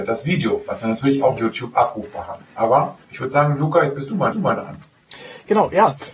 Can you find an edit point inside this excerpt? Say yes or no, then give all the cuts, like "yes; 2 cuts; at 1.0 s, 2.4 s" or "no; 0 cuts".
yes; 3 cuts; at 1.4 s, 3.0 s, 4.3 s